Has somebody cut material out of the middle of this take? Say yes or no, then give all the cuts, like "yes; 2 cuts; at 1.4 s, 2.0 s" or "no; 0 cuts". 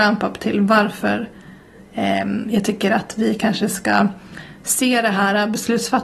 no; 0 cuts